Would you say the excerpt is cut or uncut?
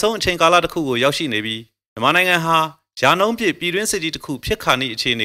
uncut